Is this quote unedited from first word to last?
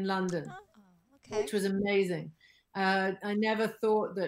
yes; 0 cuts

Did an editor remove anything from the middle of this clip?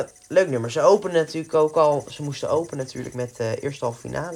no; 0 cuts

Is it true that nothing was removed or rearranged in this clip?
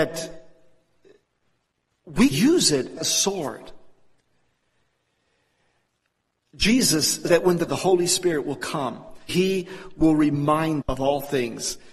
no; 6 cuts; at 2.3 s, 3.0 s, 7.3 s, 7.7 s, 9.3 s, 10.8 s

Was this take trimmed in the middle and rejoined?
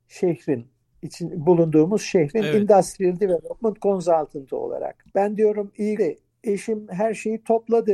yes; 2 cuts; at 5.1 s, 6.0 s

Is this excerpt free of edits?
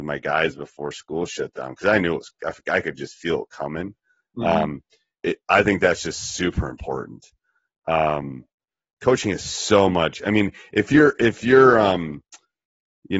yes; 0 cuts

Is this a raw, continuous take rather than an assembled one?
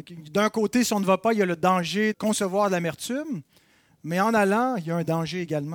no; 1 cut; at 2.1 s

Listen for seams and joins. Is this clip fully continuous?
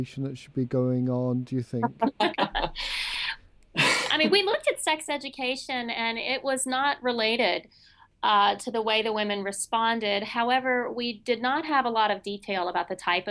yes; 0 cuts

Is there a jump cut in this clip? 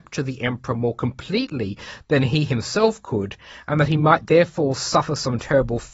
no; 0 cuts

